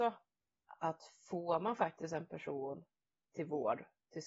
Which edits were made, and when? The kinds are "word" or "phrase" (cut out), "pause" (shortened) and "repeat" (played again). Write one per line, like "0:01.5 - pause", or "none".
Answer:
none

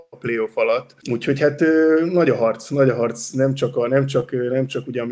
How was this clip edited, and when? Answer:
0:01.0 - pause

